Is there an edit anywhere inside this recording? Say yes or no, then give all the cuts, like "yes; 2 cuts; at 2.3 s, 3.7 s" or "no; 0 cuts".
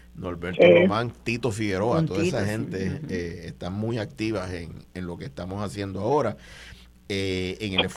no; 0 cuts